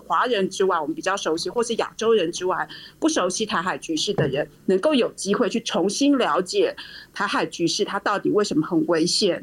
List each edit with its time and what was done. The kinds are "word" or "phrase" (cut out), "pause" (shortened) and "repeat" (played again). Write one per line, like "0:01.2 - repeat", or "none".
0:04.5 - pause